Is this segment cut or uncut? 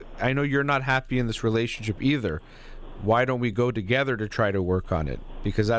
uncut